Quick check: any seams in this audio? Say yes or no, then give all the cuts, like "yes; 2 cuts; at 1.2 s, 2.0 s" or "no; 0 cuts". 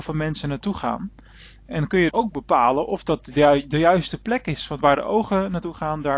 yes; 1 cut; at 2.1 s